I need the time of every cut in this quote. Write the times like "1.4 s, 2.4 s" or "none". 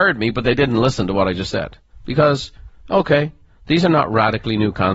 none